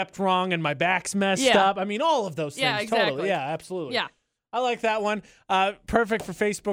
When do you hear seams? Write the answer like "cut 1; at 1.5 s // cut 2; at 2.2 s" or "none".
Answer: none

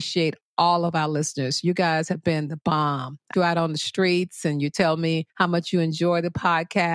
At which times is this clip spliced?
cut 1; at 3.3 s // cut 2; at 5.3 s

